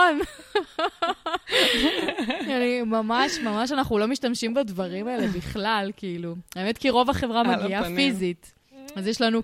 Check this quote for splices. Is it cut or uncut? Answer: uncut